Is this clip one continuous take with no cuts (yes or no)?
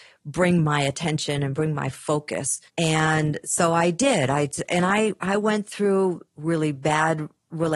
no